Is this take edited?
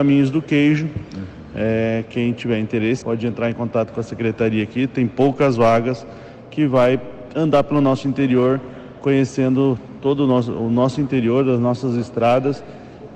yes; 1 cut; at 3.0 s

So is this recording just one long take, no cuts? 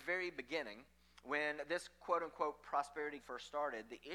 no; 1 cut; at 3.2 s

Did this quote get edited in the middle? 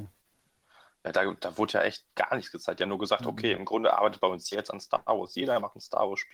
yes; 3 cuts; at 1.1 s, 2.1 s, 4.5 s

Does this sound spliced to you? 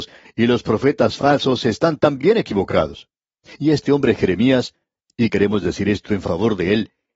no; 0 cuts

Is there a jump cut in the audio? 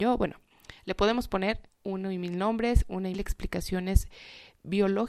yes; 2 cuts; at 1.7 s, 3.1 s

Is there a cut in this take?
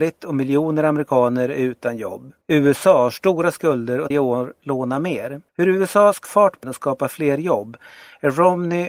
yes; 5 cuts; at 2.4 s, 4.1 s, 5.5 s, 6.2 s, 6.6 s

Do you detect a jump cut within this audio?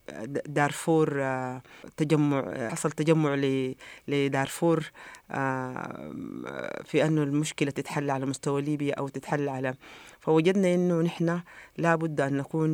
no; 0 cuts

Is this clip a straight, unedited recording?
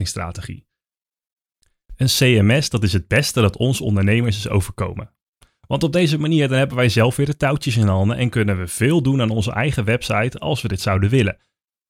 yes; 0 cuts

